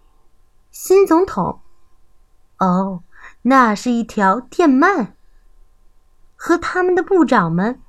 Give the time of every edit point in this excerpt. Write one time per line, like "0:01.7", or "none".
none